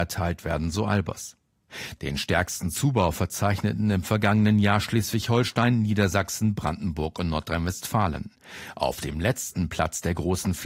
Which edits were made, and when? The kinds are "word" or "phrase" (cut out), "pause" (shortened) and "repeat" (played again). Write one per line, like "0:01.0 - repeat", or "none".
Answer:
none